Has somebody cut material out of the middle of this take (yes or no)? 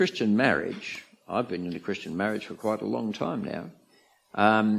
no